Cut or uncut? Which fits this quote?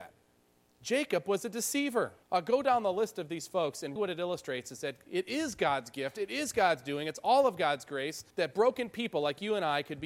cut